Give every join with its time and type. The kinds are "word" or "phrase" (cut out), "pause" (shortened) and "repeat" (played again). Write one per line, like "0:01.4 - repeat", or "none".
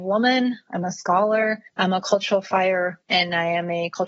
0:01.7 - pause
0:03.0 - word